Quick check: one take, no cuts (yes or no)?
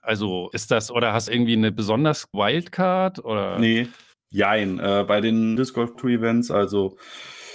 no